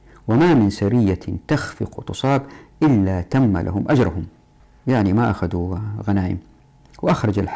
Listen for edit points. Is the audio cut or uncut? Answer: cut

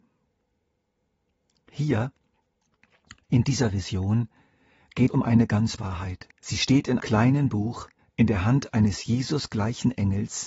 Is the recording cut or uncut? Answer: cut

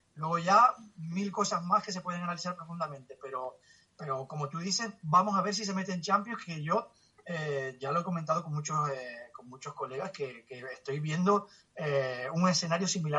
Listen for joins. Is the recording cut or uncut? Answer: uncut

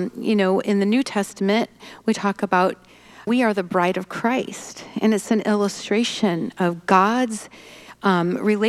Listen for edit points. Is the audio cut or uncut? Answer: cut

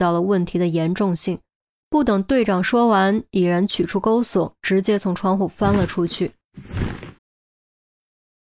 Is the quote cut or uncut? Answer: cut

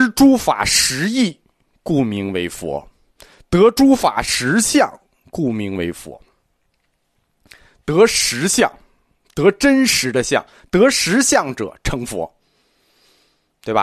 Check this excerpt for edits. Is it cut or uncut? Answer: uncut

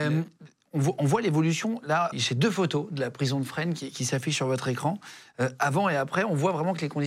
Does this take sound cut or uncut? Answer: cut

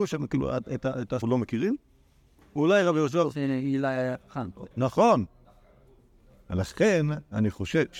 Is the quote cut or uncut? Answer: cut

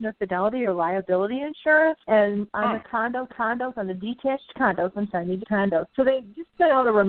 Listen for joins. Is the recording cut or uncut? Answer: cut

